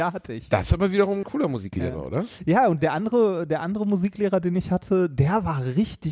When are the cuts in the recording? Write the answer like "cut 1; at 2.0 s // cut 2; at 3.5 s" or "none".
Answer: cut 1; at 1.2 s // cut 2; at 2.8 s